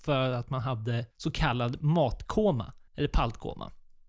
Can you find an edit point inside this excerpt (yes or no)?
yes